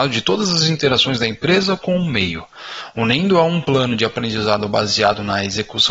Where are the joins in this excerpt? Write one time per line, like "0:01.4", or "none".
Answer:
none

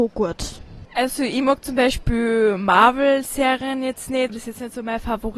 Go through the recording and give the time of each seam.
0:04.3

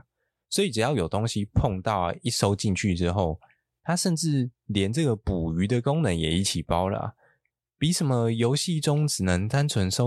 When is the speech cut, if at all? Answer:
none

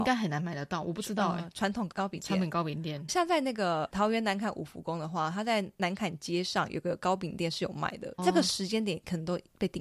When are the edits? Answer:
0:03.1
0:08.2

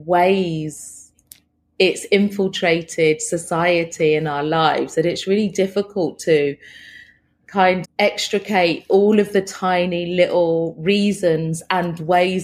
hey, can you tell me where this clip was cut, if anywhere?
0:07.8

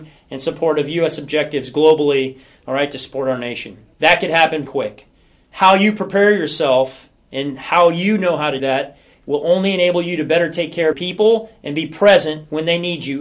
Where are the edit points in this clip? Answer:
0:03.9
0:04.7
0:08.6
0:10.9

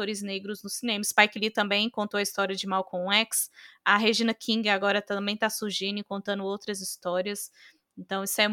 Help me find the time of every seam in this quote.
none

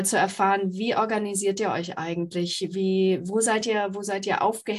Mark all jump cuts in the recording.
none

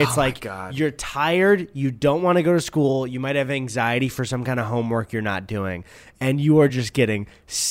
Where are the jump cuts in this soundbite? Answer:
none

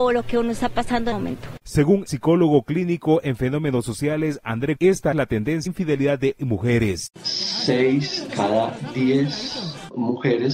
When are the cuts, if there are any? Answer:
0:01.1
0:02.1
0:03.2
0:04.8
0:05.1
0:05.7
0:06.4
0:08.3

